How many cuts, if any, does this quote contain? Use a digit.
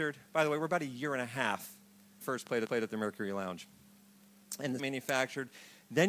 3